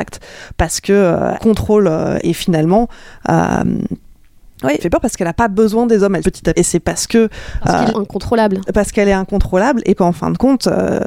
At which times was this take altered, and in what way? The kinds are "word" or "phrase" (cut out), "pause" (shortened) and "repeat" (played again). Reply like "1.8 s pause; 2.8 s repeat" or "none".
1.3 s word; 2.2 s word; 4.8 s word; 6.2 s word; 6.5 s word; 7.9 s word; 10.0 s word